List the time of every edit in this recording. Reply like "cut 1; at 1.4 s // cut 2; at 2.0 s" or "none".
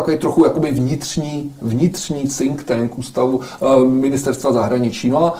none